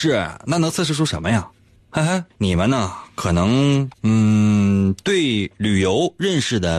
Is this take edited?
yes; 2 cuts; at 2.3 s, 3.9 s

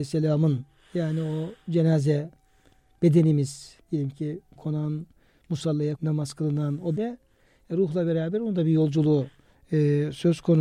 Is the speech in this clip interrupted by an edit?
yes; 3 cuts; at 4.6 s, 6.0 s, 7.0 s

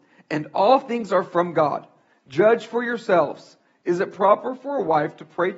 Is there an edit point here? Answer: no; 0 cuts

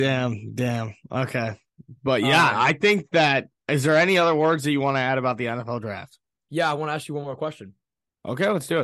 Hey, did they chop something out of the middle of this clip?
no; 0 cuts

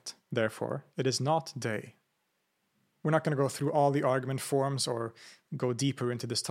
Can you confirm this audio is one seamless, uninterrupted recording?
yes; 0 cuts

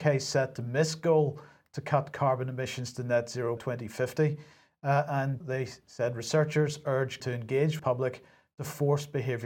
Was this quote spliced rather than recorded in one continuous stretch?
yes; 4 cuts; at 3.6 s, 5.4 s, 7.2 s, 7.8 s

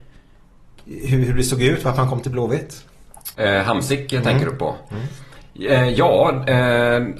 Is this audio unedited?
no; 1 cut; at 3.3 s

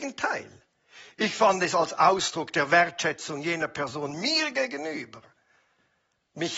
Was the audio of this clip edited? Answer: no; 0 cuts

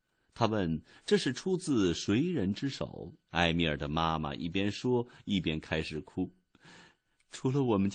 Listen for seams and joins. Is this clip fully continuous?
no; 1 cut; at 3.3 s

